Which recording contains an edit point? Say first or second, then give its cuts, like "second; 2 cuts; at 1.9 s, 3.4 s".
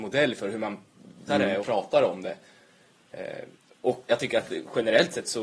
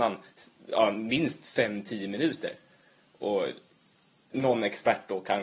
first; 3 cuts; at 1.3 s, 1.6 s, 4.1 s